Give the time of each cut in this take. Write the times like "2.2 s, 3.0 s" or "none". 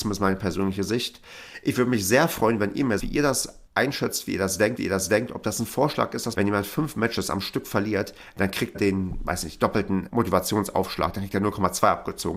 3.0 s, 3.7 s, 4.8 s, 6.3 s, 8.7 s, 10.1 s